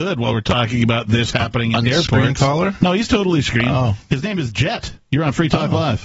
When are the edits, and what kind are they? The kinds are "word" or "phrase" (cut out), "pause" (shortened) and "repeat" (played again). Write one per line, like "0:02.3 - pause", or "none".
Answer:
none